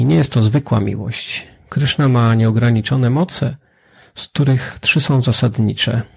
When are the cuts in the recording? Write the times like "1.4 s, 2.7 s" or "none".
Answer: none